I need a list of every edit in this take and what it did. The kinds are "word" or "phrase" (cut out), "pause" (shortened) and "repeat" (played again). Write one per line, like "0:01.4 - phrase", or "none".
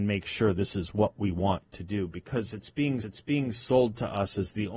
0:03.0 - repeat